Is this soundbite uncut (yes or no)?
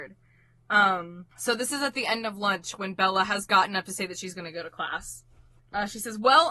no